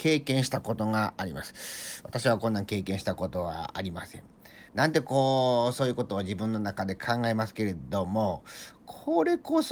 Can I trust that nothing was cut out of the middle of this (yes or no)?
no